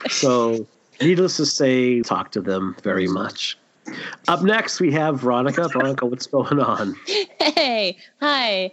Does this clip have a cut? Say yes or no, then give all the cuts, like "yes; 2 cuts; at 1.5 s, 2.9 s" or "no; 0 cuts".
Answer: yes; 1 cut; at 2.0 s